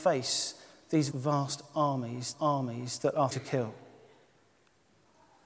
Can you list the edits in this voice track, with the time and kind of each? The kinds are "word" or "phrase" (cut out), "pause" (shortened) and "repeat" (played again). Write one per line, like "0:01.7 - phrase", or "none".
0:01.1 - word
0:02.3 - repeat
0:03.3 - word